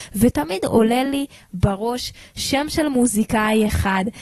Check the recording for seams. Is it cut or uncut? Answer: uncut